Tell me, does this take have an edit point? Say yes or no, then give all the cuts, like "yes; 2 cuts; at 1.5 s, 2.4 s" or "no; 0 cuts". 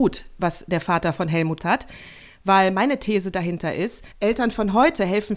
yes; 2 cuts; at 1.6 s, 4.1 s